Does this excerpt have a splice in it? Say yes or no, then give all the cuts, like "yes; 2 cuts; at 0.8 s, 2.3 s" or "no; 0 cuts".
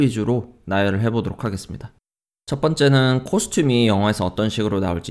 no; 0 cuts